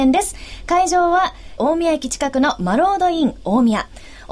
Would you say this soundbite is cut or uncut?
cut